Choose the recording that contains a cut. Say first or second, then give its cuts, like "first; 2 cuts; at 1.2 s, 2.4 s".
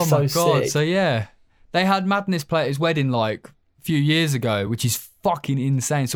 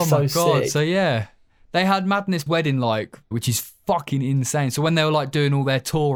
second; 2 cuts; at 2.5 s, 3.3 s